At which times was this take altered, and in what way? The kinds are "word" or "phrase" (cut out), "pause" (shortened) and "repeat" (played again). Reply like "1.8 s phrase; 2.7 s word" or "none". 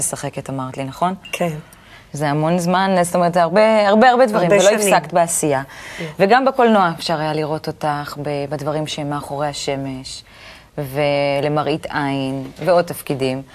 none